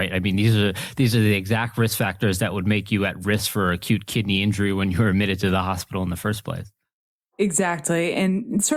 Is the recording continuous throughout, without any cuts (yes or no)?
yes